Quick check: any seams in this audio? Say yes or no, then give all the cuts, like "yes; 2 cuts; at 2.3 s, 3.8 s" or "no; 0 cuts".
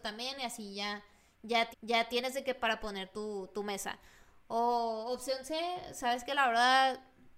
yes; 1 cut; at 1.7 s